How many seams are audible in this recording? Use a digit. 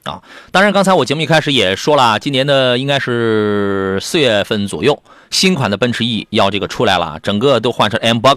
0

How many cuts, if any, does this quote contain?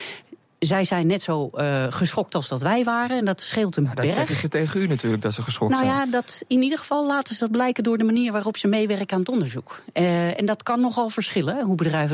0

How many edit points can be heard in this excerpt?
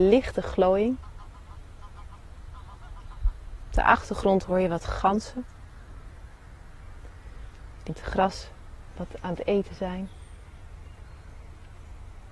1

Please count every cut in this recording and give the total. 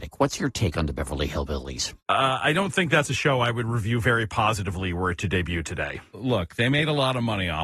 1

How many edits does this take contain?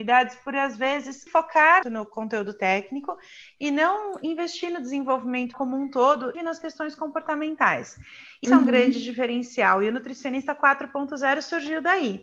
5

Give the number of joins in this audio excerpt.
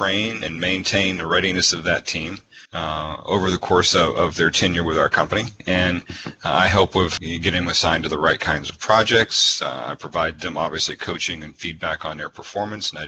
2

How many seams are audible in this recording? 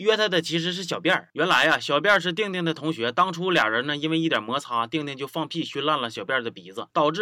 0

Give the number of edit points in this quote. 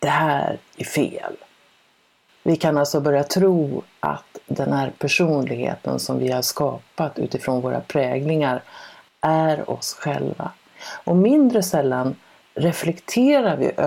0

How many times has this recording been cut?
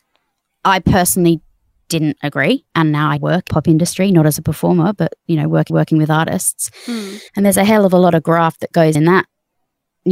6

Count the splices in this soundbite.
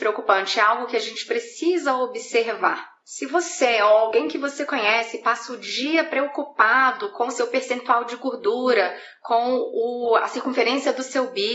1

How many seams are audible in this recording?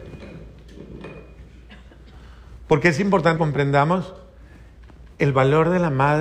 1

